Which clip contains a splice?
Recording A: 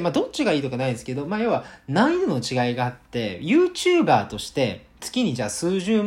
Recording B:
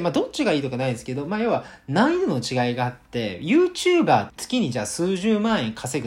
B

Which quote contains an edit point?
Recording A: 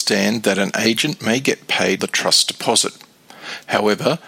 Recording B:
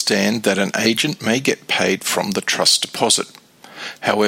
A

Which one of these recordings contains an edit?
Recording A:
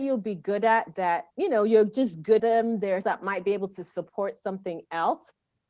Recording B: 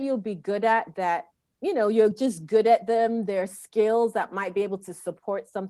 A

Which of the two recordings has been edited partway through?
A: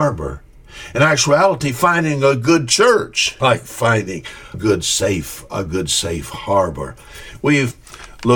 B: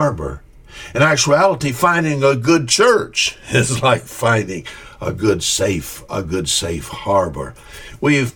A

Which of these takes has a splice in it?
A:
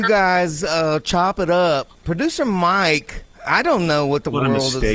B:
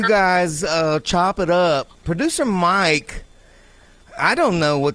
A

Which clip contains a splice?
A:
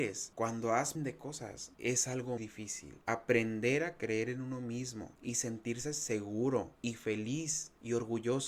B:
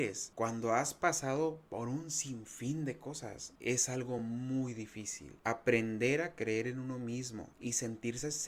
A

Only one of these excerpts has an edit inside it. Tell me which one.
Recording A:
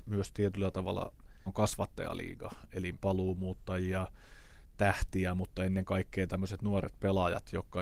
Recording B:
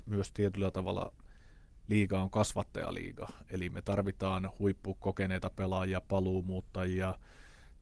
A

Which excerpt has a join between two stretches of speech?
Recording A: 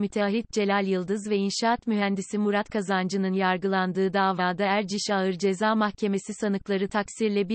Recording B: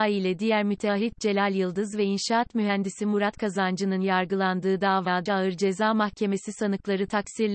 B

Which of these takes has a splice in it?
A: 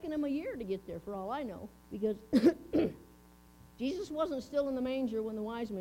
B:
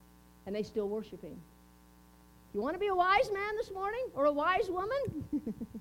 A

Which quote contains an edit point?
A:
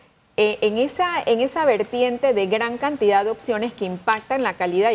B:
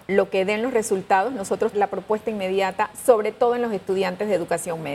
B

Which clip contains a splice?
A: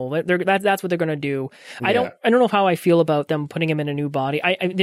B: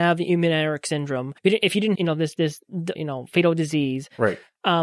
B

